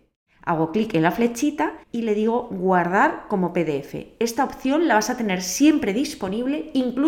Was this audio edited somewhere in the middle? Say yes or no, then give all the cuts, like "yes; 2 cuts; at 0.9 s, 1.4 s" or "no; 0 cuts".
yes; 1 cut; at 1.8 s